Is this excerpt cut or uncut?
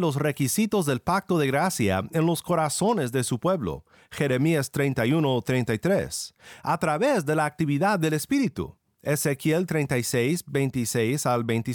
uncut